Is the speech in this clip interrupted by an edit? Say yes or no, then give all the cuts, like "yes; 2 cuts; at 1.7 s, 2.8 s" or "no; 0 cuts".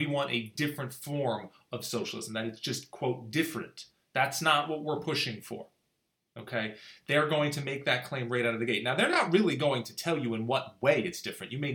no; 0 cuts